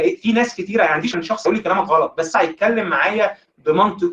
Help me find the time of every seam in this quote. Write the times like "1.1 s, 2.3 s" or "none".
1.1 s, 1.4 s, 2.3 s